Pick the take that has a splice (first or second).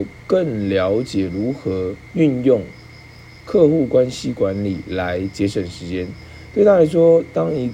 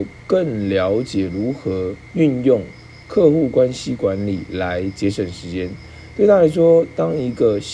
second